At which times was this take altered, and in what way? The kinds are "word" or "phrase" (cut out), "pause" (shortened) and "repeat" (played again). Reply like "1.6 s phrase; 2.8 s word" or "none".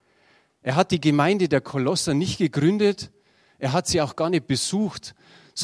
none